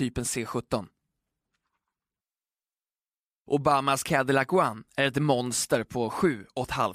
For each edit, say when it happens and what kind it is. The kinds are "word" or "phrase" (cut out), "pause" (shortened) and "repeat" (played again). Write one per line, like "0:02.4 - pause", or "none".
none